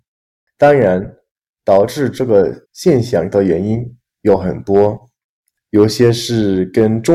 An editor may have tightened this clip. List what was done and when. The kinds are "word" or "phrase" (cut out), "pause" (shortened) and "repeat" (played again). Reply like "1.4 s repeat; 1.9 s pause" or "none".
2.6 s pause